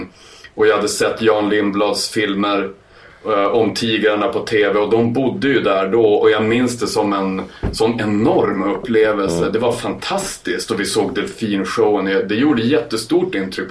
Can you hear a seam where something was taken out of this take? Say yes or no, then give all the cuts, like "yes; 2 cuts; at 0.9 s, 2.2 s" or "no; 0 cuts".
no; 0 cuts